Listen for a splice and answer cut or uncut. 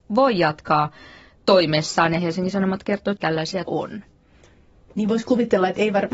cut